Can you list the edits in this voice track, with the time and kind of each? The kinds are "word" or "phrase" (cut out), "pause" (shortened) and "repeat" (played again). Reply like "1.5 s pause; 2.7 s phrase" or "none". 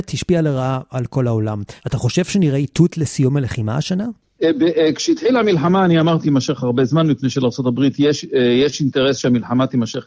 1.8 s pause; 6.2 s word